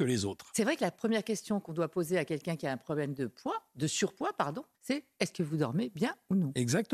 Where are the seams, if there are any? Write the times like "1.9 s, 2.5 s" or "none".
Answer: 4.7 s